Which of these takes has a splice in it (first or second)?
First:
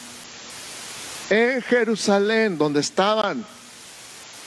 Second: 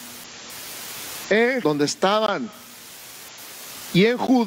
second